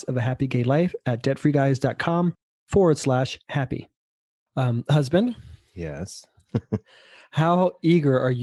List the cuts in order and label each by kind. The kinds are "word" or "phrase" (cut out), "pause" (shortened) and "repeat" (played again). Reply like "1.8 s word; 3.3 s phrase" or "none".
none